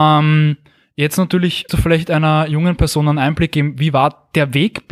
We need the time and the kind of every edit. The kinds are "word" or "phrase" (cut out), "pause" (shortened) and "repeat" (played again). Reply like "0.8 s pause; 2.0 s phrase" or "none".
1.7 s word